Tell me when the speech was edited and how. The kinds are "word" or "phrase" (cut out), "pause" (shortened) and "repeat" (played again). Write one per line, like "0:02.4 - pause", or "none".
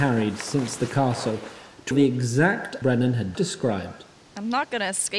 0:01.9 - word
0:02.8 - word
0:03.3 - word

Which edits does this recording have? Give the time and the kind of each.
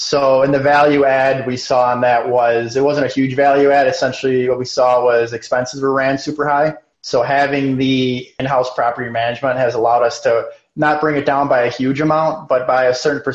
0:06.9 - pause

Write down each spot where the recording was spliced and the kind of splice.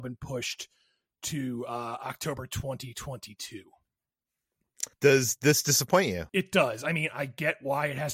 0:04.9 - pause
0:06.3 - pause

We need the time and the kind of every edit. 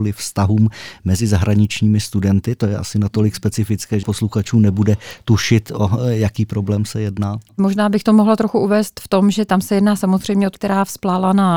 0:04.0 - word
0:10.5 - word

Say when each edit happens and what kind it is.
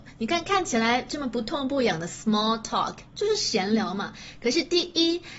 none

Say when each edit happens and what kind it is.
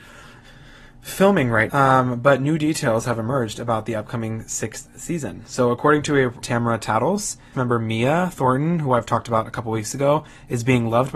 0:01.7 - word
0:06.4 - phrase
0:07.5 - phrase

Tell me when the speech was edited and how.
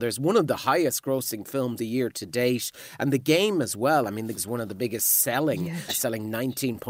0:01.8 - word
0:04.4 - word
0:05.9 - word

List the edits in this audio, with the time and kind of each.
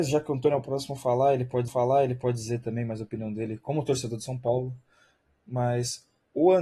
0:01.7 - repeat

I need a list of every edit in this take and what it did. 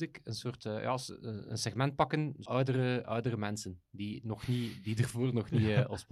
0:02.5 - word

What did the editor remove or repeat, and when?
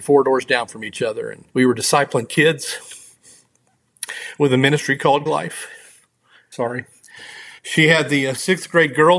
0:01.5 - pause
0:05.3 - word
0:07.6 - pause

